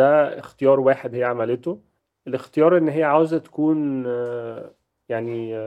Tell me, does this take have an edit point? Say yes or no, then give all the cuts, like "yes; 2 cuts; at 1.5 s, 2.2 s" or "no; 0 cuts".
yes; 1 cut; at 2.0 s